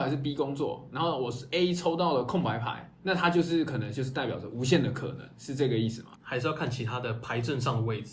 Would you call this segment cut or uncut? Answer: uncut